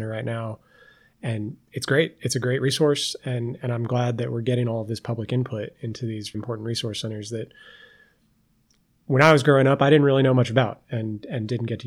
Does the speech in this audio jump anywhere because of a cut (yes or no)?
yes